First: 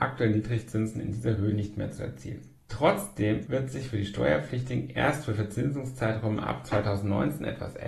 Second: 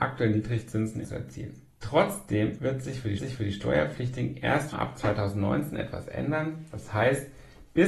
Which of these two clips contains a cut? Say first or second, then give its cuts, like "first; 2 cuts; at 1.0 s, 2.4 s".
second; 3 cuts; at 1.0 s, 3.2 s, 4.7 s